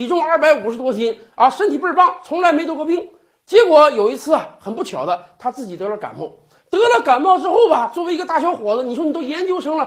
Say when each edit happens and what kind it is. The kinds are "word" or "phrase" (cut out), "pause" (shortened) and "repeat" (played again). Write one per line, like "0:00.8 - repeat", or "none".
none